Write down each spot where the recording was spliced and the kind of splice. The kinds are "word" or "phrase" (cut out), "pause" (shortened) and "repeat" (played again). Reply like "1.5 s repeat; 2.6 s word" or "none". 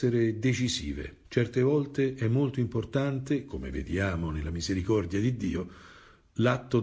1.2 s pause